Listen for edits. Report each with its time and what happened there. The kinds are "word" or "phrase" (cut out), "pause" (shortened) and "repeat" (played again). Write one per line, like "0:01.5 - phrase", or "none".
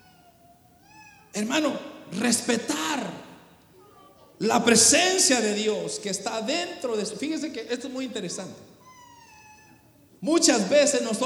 0:07.7 - word